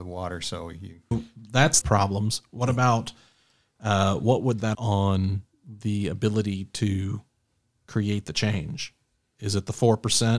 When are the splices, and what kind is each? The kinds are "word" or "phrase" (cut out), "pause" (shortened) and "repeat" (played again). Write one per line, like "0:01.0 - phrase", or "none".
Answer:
0:01.1 - word
0:01.8 - phrase
0:04.7 - phrase